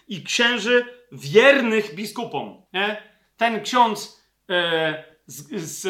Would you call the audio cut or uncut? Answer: cut